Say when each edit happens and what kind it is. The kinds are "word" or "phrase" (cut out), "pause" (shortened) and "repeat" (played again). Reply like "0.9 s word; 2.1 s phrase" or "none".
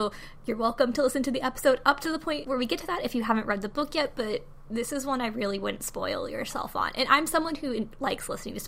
none

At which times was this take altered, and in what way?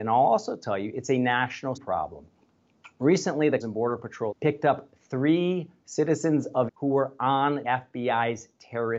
1.8 s word; 3.6 s word; 4.3 s word; 5.8 s word; 6.7 s word; 7.6 s word

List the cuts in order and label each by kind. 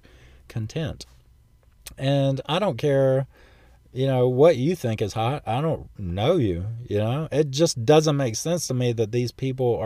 none

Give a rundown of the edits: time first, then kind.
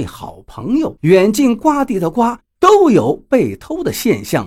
1.0 s pause

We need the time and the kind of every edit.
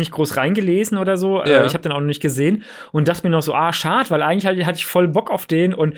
none

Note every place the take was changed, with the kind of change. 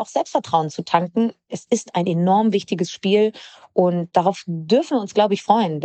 none

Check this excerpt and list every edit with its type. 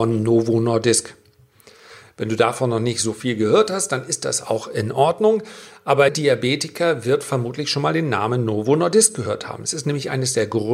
6.1 s word

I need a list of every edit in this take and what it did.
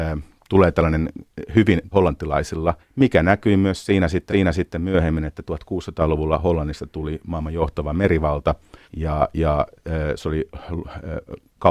1.9 s phrase; 2.8 s pause; 4.3 s repeat; 8.8 s pause

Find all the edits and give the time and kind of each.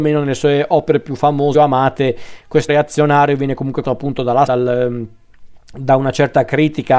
1.5 s phrase; 2.7 s word; 3.8 s word; 4.5 s word

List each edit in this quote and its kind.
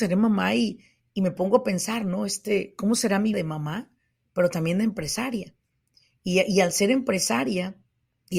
3.3 s word

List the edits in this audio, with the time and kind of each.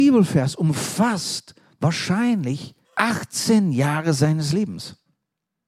2.8 s pause

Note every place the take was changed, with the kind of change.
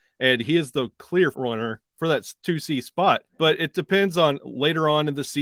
1.3 s word; 3.3 s pause

